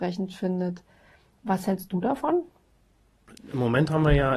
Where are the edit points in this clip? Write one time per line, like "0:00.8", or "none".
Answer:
none